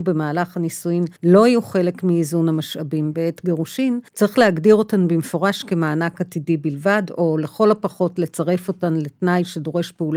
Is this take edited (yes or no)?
yes